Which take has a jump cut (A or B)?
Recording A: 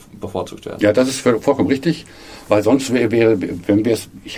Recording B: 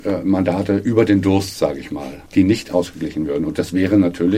B